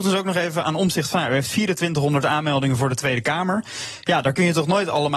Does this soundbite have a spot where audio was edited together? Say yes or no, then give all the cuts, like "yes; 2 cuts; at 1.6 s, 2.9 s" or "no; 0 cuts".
no; 0 cuts